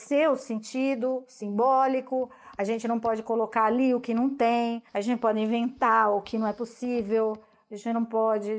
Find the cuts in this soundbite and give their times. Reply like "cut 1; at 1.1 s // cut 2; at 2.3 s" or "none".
cut 1; at 4.9 s